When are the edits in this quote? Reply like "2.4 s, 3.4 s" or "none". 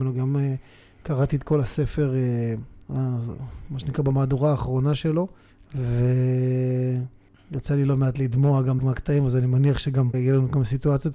8.8 s, 10.1 s